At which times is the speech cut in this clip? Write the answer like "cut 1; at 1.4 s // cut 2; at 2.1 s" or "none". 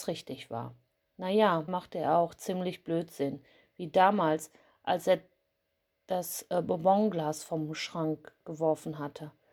cut 1; at 1.7 s